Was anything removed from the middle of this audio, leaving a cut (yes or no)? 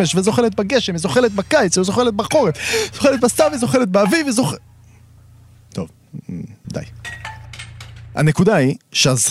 no